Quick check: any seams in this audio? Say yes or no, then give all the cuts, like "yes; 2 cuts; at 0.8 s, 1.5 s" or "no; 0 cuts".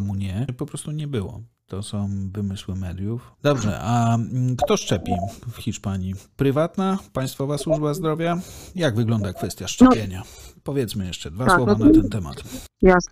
no; 0 cuts